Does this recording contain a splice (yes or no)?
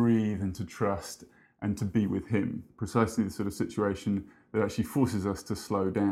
no